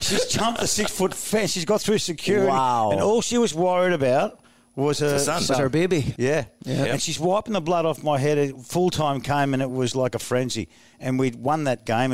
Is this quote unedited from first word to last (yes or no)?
yes